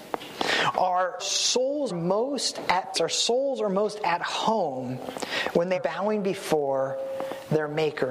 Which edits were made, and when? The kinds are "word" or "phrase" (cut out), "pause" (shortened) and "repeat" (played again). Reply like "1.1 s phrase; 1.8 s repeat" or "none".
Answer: 1.2 s word; 1.9 s word; 2.9 s word; 5.7 s word